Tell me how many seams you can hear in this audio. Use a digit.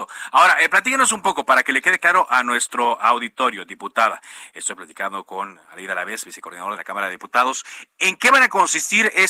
1